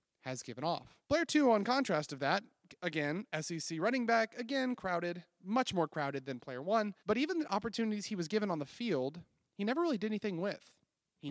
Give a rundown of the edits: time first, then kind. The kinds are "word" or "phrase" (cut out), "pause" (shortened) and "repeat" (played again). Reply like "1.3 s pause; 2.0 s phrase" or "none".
1.0 s pause; 7.0 s pause